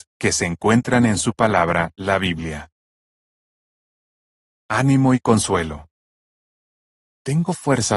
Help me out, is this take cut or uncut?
uncut